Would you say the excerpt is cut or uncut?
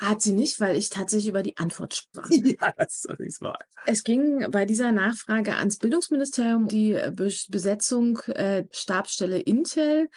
cut